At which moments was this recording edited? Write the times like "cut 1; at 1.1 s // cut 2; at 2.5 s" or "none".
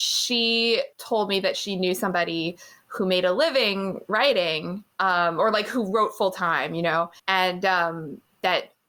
cut 1; at 0.9 s // cut 2; at 4.9 s // cut 3; at 7.2 s